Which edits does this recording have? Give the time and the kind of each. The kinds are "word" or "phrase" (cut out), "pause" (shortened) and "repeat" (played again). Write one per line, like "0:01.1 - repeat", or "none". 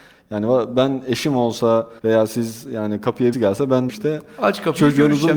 0:02.0 - pause
0:03.3 - word
0:03.9 - word